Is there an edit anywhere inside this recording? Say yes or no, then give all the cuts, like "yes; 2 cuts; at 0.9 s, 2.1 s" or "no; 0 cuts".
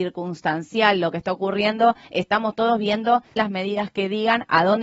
yes; 1 cut; at 3.4 s